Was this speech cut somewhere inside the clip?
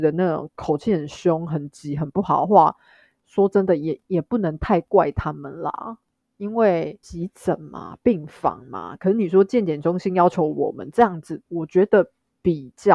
no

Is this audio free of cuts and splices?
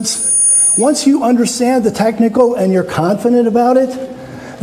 yes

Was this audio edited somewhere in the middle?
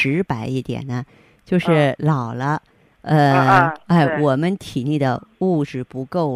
no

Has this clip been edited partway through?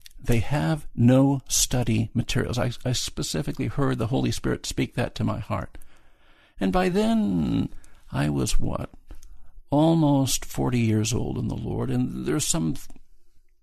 no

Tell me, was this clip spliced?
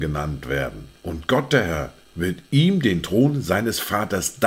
yes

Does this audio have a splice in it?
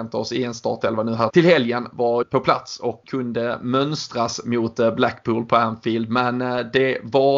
yes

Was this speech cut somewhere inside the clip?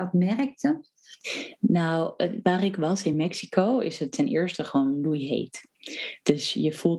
no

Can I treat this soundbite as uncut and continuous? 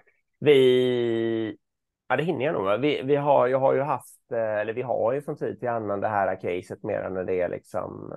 yes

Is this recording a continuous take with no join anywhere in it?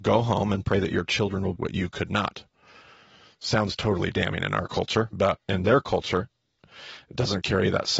no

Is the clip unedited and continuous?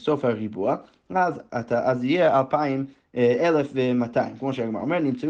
yes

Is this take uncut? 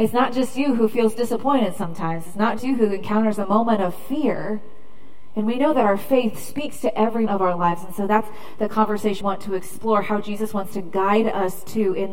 no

